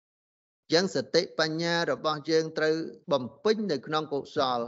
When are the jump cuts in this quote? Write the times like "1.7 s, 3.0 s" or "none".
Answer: 3.0 s

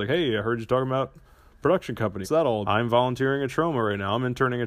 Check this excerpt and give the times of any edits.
2.2 s, 2.6 s

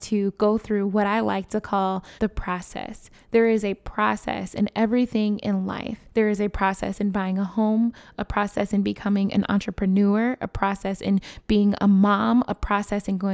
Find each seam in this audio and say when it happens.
2.2 s, 6.1 s

